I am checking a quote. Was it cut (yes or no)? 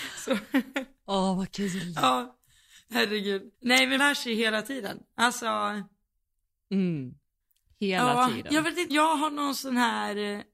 yes